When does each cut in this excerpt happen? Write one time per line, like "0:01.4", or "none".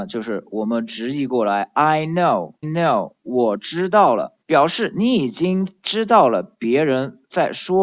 0:02.6
0:04.4